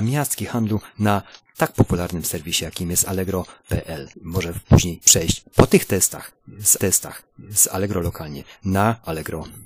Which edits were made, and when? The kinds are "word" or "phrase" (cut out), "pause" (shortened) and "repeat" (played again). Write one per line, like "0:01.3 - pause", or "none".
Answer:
0:04.1 - pause
0:06.8 - repeat